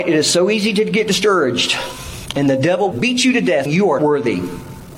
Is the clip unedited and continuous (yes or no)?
no